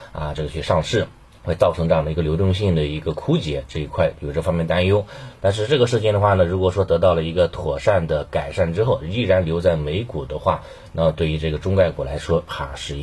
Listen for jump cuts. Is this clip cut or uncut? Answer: cut